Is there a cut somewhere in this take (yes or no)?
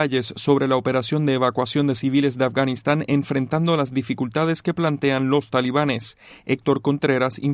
no